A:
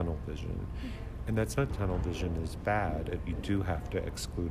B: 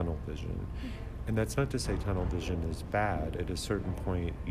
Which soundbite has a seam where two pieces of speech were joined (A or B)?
A